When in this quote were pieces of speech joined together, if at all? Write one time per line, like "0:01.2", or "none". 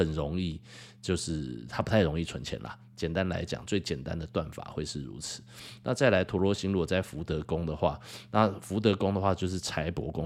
none